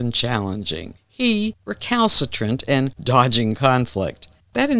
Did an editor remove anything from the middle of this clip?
yes; 1 cut; at 3.0 s

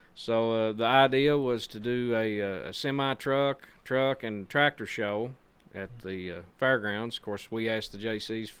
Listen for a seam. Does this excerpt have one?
no; 0 cuts

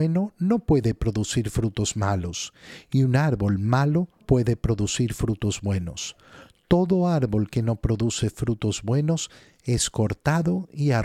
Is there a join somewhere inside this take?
yes; 1 cut; at 4.2 s

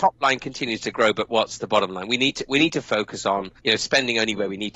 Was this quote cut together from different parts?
yes; 1 cut; at 3.6 s

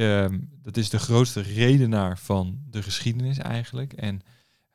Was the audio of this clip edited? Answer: no; 0 cuts

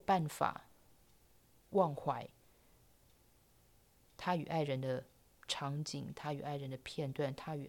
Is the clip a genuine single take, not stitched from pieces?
yes; 0 cuts

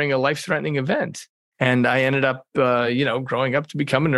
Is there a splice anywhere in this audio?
no; 0 cuts

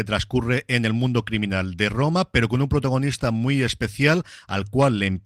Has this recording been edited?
no; 0 cuts

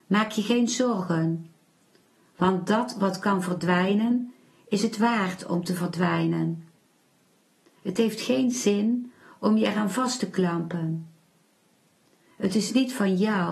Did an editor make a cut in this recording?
no; 0 cuts

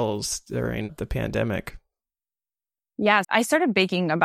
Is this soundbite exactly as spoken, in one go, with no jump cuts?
no; 1 cut; at 3.2 s

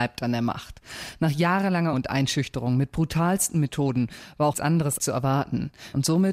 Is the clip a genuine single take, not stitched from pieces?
no; 3 cuts; at 1.9 s, 4.5 s, 5.0 s

